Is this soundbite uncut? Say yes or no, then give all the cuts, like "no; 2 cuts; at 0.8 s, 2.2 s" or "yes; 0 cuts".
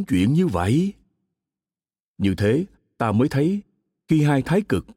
yes; 0 cuts